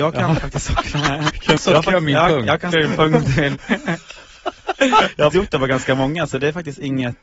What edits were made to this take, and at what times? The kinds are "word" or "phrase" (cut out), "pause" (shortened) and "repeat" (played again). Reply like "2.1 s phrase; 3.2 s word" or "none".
1.6 s word; 2.7 s word; 5.3 s word